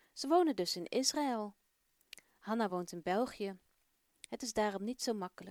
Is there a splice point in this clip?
no; 0 cuts

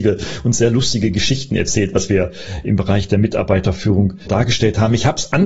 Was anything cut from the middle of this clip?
yes; 1 cut; at 4.3 s

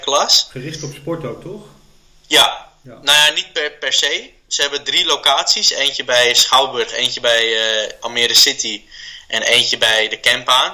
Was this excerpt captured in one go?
yes; 0 cuts

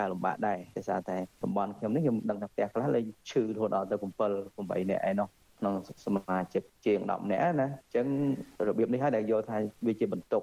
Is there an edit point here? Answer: yes; 1 cut; at 7.8 s

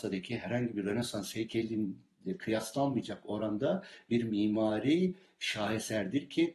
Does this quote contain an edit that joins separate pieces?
no; 0 cuts

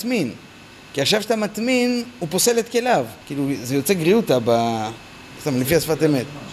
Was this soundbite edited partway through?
yes; 2 cuts; at 3.2 s, 5.4 s

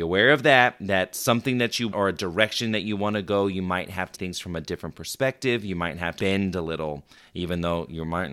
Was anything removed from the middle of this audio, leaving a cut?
yes; 3 cuts; at 1.9 s, 4.1 s, 6.2 s

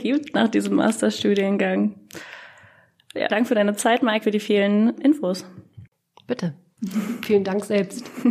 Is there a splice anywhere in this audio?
yes; 3 cuts; at 3.3 s, 4.2 s, 5.0 s

